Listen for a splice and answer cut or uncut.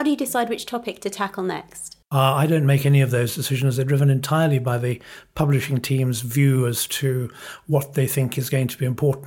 cut